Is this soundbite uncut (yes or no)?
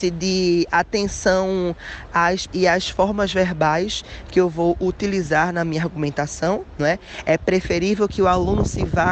no